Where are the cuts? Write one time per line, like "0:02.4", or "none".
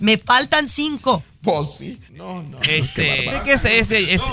0:02.1
0:03.3